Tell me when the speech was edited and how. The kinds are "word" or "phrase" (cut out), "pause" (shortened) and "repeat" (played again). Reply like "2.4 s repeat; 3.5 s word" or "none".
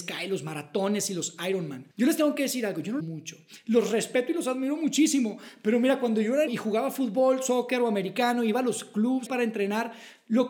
1.9 s pause; 3.0 s phrase; 6.5 s word; 9.3 s word